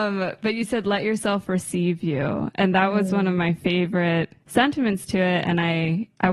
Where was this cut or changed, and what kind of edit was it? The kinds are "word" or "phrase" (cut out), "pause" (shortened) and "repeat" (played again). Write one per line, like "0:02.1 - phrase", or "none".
0:04.4 - pause